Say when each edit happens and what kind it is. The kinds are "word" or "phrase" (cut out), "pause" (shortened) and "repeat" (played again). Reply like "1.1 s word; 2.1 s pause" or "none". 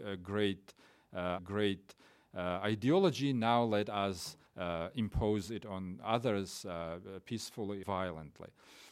1.4 s repeat; 4.5 s pause; 7.8 s word